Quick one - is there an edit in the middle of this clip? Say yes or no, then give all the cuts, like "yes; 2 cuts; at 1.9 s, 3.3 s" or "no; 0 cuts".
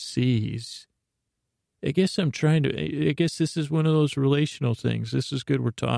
no; 0 cuts